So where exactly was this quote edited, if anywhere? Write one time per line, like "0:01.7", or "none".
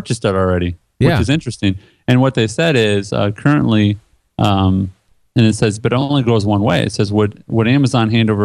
none